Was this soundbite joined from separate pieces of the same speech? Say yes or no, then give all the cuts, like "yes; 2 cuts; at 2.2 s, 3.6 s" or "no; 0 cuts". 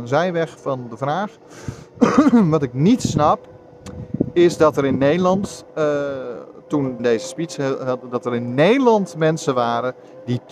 yes; 1 cut; at 7.0 s